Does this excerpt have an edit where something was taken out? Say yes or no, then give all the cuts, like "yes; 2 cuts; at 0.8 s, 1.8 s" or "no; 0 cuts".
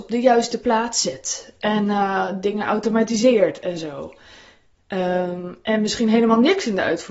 no; 0 cuts